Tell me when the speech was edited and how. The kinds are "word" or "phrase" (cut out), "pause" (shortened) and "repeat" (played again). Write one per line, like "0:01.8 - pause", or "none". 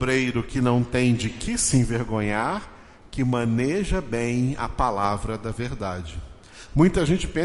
none